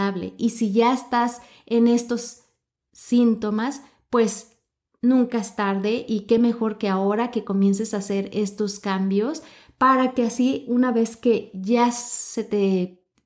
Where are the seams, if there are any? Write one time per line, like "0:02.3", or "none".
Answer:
none